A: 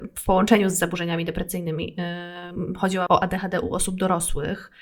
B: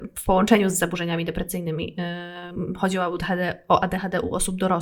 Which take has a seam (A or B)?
A